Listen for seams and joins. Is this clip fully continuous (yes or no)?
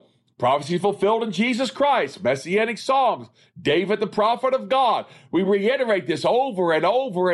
yes